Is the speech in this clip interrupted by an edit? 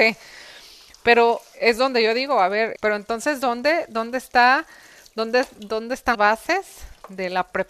yes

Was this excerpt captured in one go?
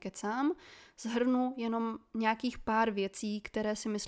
yes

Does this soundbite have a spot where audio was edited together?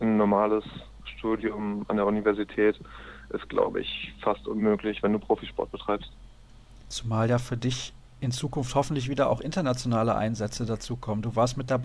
no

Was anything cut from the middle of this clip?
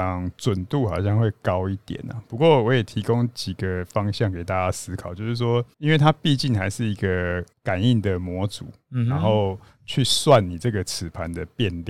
yes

